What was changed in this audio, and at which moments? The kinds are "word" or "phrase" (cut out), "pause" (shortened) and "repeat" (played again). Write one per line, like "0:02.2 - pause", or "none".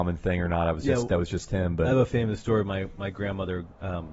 none